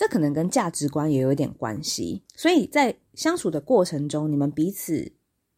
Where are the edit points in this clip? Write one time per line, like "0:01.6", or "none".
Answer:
0:02.3